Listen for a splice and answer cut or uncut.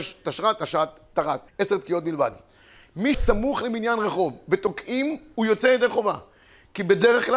cut